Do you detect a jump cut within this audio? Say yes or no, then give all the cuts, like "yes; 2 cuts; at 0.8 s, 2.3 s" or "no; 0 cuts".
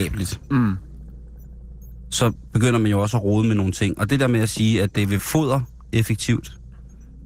yes; 1 cut; at 5.2 s